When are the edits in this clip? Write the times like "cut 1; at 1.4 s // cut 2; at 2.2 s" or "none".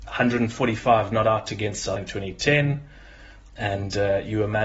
cut 1; at 2.0 s